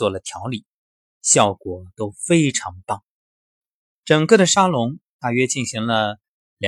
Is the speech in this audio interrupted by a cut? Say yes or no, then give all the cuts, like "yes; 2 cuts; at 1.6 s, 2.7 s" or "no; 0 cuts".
yes; 1 cut; at 3.6 s